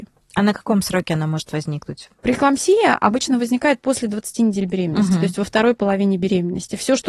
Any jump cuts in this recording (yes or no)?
no